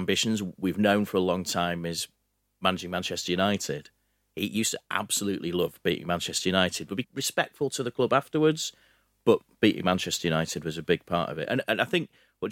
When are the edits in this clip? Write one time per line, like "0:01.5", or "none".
0:07.0